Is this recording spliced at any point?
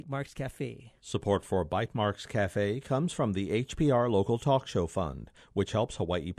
yes; 1 cut; at 1.0 s

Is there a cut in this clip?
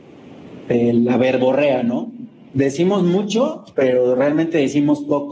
yes; 1 cut; at 3.7 s

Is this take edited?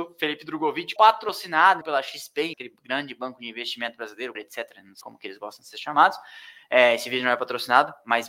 yes; 5 cuts; at 1.0 s, 1.8 s, 2.5 s, 4.3 s, 5.0 s

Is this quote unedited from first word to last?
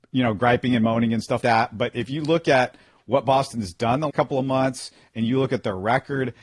no; 2 cuts; at 1.4 s, 4.1 s

